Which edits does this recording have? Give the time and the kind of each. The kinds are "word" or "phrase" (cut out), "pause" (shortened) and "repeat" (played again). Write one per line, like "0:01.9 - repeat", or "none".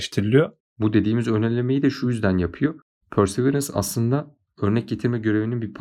none